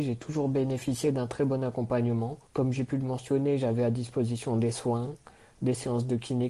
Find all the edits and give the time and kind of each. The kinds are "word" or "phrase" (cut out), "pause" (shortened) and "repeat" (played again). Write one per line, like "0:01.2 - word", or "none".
0:02.5 - pause